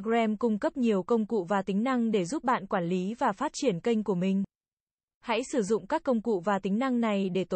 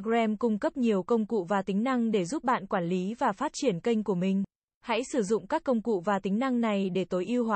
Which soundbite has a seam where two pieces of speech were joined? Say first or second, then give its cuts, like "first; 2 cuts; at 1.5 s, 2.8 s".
second; 1 cut; at 4.6 s